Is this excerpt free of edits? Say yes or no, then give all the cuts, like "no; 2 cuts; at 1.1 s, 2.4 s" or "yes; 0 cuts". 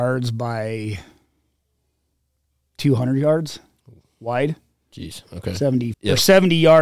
no; 1 cut; at 5.9 s